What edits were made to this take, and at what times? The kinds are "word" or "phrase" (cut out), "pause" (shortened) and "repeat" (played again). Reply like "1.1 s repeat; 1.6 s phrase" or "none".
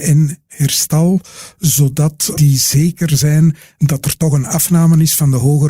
none